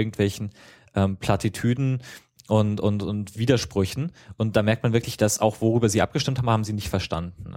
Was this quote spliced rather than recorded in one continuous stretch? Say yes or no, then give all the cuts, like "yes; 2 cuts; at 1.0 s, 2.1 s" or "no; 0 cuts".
no; 0 cuts